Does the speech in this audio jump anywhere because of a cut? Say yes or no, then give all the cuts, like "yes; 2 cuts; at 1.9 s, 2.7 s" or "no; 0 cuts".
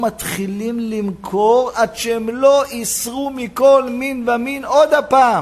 no; 0 cuts